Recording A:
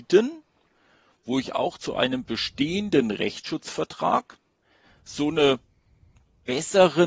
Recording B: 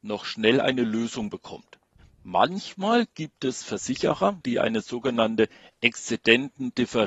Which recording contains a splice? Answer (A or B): B